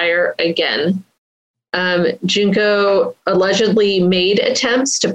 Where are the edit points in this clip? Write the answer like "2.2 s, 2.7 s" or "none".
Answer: none